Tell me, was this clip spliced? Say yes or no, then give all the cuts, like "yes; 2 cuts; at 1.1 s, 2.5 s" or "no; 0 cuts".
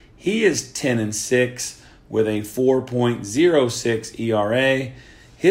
no; 0 cuts